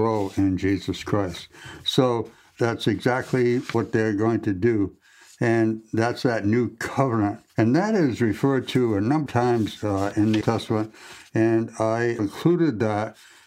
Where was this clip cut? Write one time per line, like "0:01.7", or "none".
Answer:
0:07.5
0:09.3
0:10.4
0:12.2